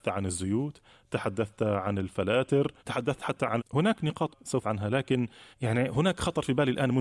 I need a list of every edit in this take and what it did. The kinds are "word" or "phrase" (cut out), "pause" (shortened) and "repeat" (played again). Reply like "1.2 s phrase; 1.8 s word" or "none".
2.8 s pause; 3.6 s word; 4.3 s word; 4.6 s word; 5.5 s pause